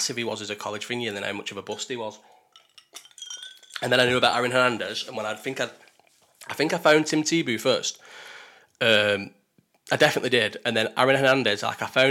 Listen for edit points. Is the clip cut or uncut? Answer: uncut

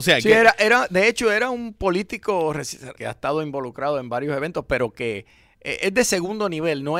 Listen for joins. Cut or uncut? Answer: cut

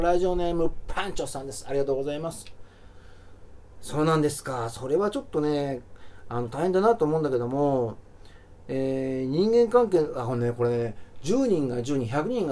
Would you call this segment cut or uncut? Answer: uncut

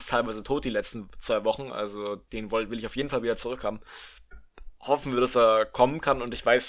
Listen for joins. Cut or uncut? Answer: uncut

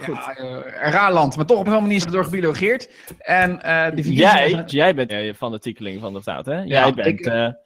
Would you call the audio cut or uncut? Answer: cut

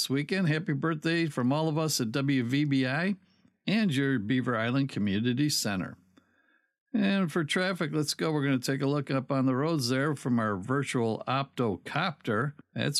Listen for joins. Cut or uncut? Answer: uncut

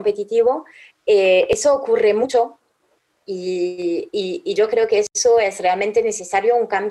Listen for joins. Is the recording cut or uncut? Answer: uncut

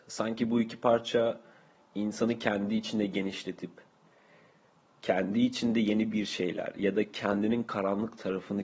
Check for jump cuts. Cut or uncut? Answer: uncut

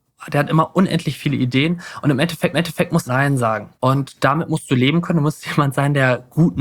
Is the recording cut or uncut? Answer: cut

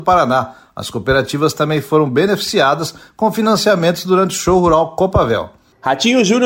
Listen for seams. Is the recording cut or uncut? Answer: uncut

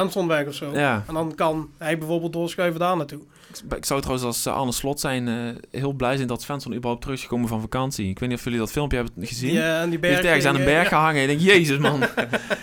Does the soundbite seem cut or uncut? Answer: uncut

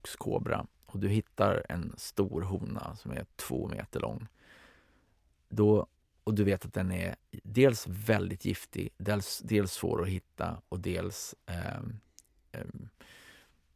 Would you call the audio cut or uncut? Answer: uncut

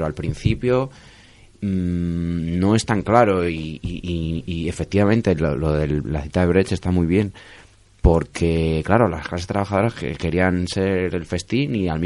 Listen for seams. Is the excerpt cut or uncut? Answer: uncut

